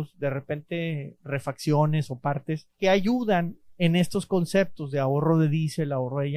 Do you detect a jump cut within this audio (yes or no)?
yes